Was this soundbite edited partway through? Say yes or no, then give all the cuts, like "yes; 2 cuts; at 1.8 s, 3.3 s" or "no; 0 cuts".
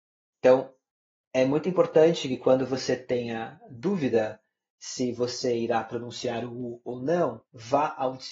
no; 0 cuts